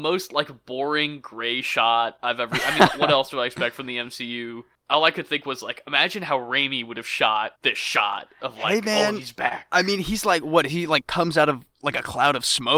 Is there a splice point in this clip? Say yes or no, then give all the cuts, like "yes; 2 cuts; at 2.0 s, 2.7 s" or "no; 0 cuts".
yes; 2 cuts; at 7.6 s, 11.7 s